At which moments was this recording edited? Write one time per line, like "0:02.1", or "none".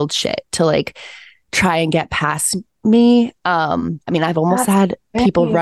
0:04.1